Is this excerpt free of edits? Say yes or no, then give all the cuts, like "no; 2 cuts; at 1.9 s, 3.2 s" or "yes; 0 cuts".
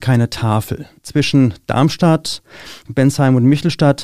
no; 1 cut; at 2.9 s